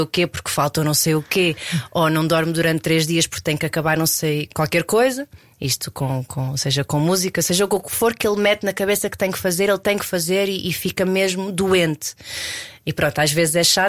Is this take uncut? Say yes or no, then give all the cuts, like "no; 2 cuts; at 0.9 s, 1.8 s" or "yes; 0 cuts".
yes; 0 cuts